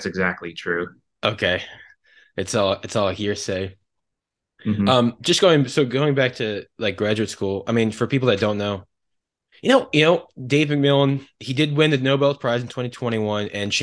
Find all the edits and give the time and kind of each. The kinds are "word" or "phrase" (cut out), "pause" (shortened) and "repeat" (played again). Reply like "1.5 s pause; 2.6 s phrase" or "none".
none